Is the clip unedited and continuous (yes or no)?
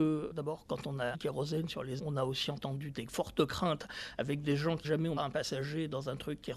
no